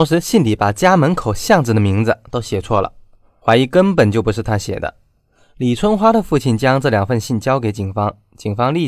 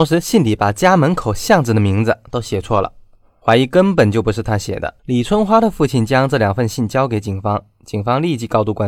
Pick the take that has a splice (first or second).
second